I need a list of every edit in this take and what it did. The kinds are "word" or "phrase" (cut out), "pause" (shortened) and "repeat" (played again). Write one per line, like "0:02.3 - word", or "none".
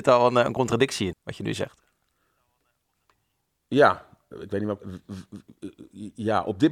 0:01.1 - word
0:04.3 - word
0:04.8 - phrase